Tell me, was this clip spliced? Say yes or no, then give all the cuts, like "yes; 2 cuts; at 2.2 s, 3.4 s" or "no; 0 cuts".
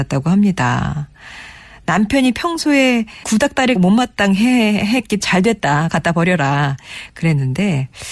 yes; 3 cuts; at 3.2 s, 3.8 s, 5.2 s